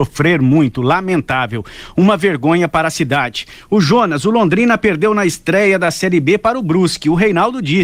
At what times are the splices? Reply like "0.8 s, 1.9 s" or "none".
none